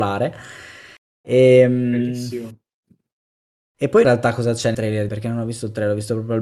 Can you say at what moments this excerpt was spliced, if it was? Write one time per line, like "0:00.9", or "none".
0:04.0
0:04.7
0:05.1